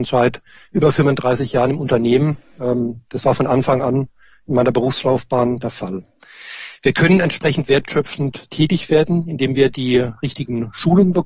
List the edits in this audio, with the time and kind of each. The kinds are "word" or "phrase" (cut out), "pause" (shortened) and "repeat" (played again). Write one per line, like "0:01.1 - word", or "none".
none